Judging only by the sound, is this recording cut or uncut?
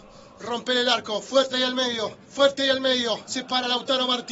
cut